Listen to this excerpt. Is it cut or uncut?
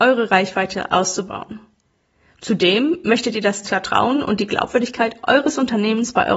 uncut